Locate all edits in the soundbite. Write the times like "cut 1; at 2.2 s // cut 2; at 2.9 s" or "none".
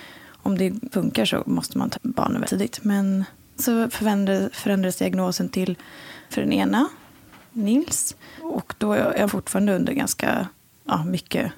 cut 1; at 0.9 s // cut 2; at 1.9 s // cut 3; at 2.4 s // cut 4; at 3.6 s // cut 5; at 6.3 s // cut 6; at 9.3 s

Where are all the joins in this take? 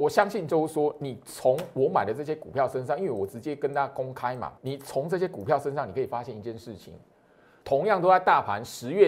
cut 1; at 4.6 s

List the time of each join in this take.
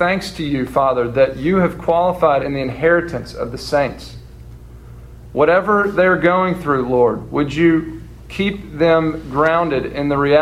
cut 1; at 2.4 s

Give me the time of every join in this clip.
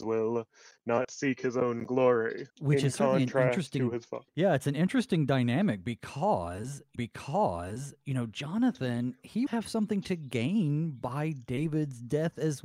cut 1; at 2.5 s // cut 2; at 4.3 s // cut 3; at 7.0 s // cut 4; at 9.5 s

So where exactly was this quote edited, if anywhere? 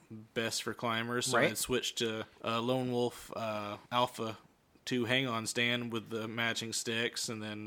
cut 1; at 2.3 s // cut 2; at 3.8 s

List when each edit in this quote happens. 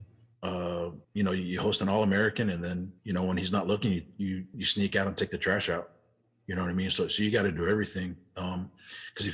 cut 1; at 1.0 s // cut 2; at 3.0 s // cut 3; at 4.5 s

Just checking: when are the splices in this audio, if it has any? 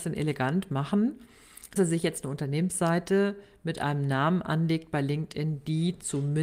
cut 1; at 1.8 s

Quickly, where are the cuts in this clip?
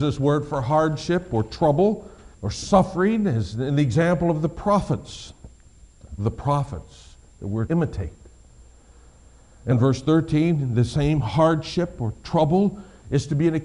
cut 1; at 2.3 s // cut 2; at 6.2 s // cut 3; at 7.7 s // cut 4; at 9.7 s

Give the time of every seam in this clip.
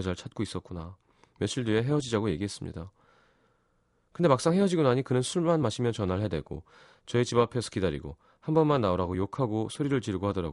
none

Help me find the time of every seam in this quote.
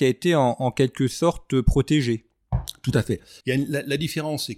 cut 1; at 3.4 s

